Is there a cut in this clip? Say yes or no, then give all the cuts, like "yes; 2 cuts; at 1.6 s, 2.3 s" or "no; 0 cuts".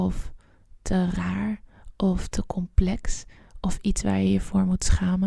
no; 0 cuts